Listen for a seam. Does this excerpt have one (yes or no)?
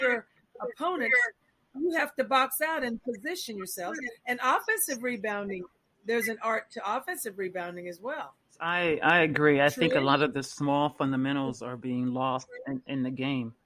no